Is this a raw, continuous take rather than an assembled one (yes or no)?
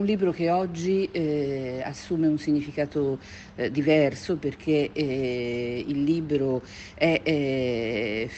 yes